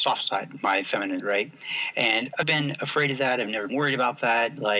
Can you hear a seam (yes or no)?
yes